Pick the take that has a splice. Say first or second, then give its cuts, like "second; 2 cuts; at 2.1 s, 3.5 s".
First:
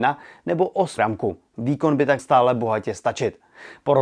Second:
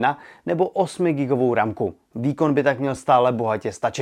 first; 2 cuts; at 1.0 s, 2.2 s